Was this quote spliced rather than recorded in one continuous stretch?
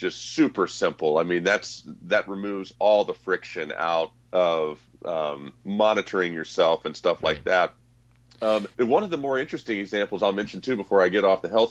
yes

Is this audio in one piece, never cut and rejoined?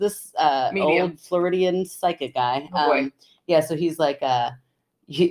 yes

